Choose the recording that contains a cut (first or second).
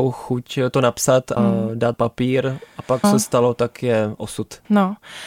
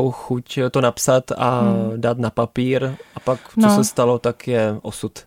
first